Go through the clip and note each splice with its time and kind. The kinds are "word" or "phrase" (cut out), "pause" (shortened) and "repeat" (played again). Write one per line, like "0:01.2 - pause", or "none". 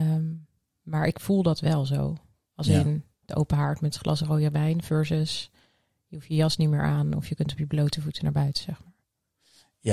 none